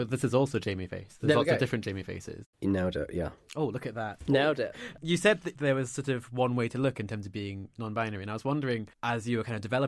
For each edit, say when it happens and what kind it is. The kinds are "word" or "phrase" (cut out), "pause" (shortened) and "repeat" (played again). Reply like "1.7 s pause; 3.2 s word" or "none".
2.5 s pause; 8.9 s pause